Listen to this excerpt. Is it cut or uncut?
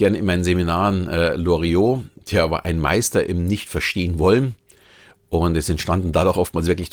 uncut